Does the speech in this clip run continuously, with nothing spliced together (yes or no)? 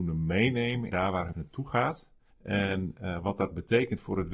no